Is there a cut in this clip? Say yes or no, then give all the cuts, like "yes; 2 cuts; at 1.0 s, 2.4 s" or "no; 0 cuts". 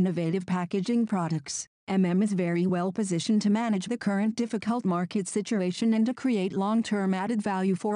no; 0 cuts